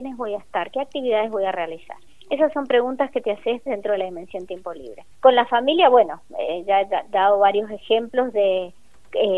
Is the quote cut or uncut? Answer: cut